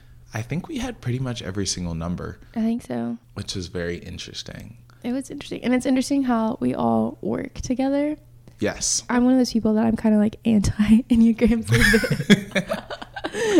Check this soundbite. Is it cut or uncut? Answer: cut